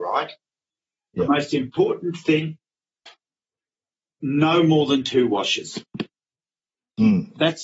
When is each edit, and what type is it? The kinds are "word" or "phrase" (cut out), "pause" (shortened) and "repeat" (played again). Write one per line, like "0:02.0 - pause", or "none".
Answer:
none